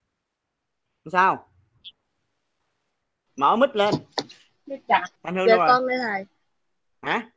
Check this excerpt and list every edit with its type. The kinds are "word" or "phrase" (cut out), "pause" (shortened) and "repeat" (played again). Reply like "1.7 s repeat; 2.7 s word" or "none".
5.2 s pause